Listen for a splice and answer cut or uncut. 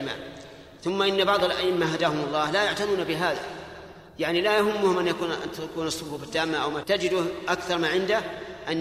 cut